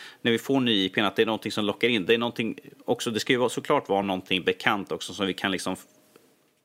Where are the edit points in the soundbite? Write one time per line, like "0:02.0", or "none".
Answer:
none